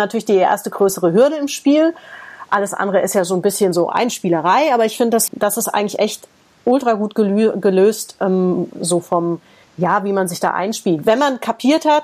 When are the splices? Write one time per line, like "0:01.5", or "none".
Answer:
0:05.3
0:09.6